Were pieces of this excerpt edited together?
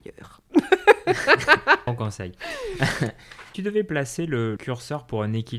yes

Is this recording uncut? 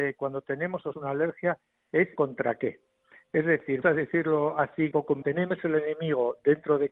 no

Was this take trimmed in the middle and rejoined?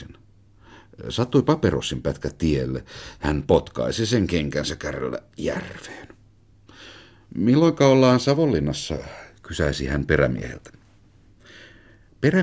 no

